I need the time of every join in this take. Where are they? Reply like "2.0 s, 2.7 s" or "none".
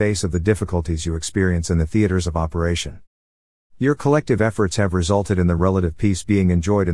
none